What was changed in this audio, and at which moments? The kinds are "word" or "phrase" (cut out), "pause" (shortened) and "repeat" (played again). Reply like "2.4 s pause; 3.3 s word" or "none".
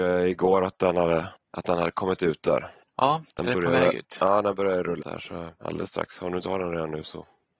3.3 s pause; 5.0 s word; 5.5 s pause